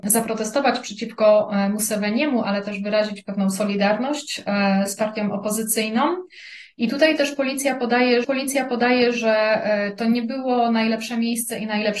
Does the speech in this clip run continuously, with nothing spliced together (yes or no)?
no